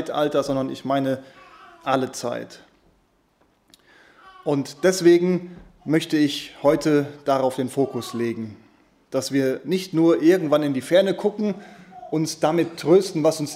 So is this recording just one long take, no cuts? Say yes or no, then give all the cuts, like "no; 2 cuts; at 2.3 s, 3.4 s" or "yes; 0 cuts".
yes; 0 cuts